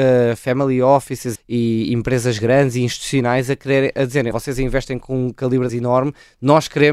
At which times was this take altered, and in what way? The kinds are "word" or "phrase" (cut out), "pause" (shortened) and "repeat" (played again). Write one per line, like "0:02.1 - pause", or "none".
0:01.4 - word
0:04.3 - word
0:05.7 - word